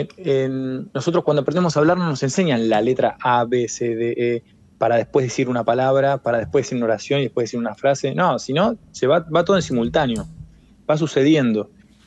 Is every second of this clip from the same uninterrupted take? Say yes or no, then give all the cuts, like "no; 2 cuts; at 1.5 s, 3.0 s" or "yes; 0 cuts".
no; 1 cut; at 0.9 s